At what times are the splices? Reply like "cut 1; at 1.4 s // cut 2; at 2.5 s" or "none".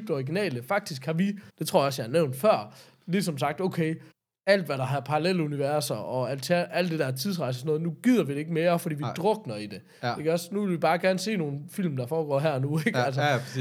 cut 1; at 1.5 s // cut 2; at 4.1 s